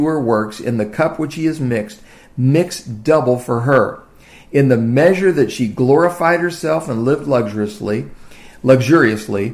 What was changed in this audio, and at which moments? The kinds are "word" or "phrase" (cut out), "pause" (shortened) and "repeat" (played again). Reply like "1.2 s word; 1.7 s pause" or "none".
none